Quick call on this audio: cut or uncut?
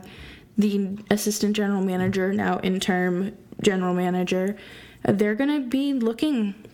uncut